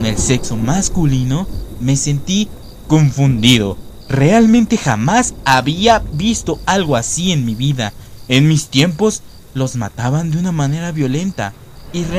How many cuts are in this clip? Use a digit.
0